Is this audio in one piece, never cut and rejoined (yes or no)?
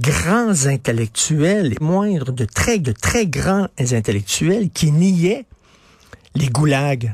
no